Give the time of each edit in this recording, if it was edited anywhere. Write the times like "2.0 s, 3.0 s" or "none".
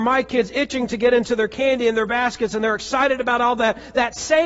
none